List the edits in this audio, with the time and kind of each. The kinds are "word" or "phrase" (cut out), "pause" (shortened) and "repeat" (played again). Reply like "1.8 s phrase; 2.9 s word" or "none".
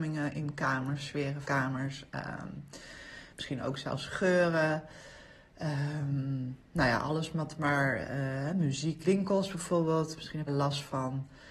1.4 s word; 9.0 s word; 10.5 s phrase